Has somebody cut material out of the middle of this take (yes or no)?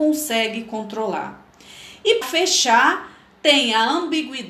yes